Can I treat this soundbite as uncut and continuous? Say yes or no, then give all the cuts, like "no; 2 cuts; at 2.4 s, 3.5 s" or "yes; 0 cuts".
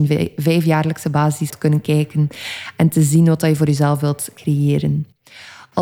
no; 1 cut; at 1.5 s